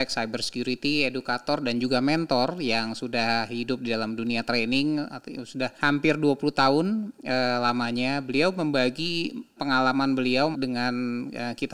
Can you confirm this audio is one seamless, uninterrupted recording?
no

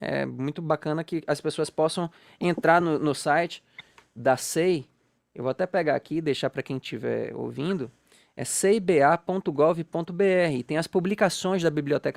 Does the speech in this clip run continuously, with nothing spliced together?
yes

